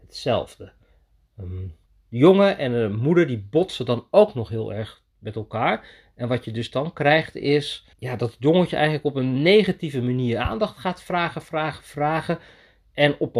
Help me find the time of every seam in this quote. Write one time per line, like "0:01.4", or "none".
0:01.9
0:07.9